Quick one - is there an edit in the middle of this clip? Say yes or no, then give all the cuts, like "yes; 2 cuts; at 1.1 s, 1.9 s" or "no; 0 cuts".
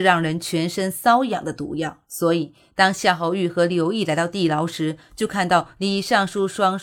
yes; 1 cut; at 2.0 s